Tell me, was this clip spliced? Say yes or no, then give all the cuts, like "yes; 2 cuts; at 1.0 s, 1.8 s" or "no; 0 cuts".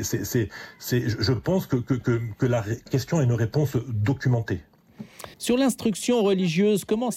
yes; 2 cuts; at 2.9 s, 5.3 s